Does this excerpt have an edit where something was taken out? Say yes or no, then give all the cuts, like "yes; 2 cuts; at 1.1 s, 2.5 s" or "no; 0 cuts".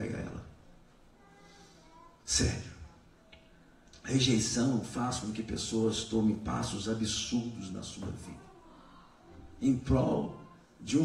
no; 0 cuts